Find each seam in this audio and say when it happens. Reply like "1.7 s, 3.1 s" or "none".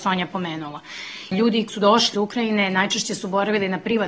1.7 s, 2.1 s